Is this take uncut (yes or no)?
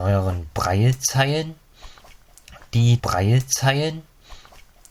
no